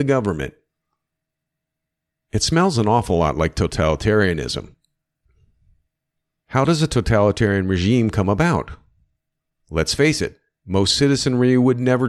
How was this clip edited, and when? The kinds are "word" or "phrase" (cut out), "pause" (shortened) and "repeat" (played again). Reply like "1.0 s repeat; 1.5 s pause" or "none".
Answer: none